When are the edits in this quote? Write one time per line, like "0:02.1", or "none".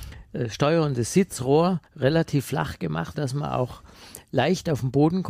0:01.9
0:03.1